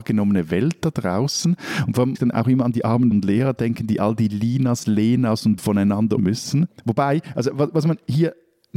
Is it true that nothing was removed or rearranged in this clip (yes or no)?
no